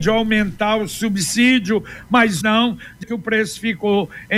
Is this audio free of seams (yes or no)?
no